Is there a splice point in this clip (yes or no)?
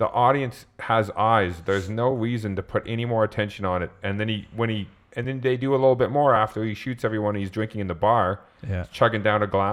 no